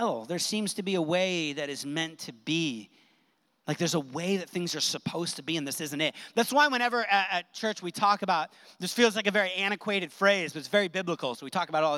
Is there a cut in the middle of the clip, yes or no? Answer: no